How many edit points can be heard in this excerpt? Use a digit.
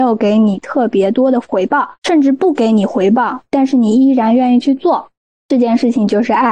1